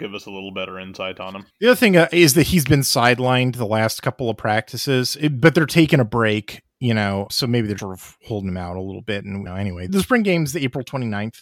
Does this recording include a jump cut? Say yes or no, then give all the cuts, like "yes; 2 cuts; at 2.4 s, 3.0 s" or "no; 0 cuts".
yes; 5 cuts; at 1.5 s, 7.3 s, 7.8 s, 9.5 s, 9.9 s